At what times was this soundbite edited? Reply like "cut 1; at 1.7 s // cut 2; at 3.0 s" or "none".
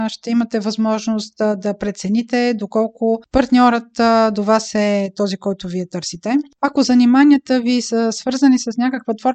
none